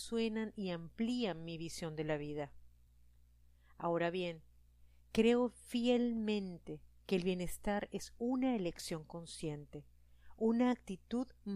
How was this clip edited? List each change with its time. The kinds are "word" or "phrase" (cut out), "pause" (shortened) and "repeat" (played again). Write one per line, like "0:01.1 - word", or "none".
none